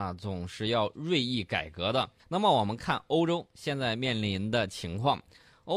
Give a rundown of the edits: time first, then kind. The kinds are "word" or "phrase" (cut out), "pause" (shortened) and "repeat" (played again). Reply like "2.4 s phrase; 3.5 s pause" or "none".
2.2 s pause